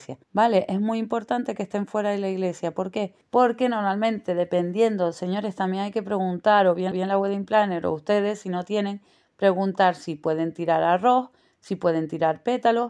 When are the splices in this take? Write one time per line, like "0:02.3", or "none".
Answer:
0:06.9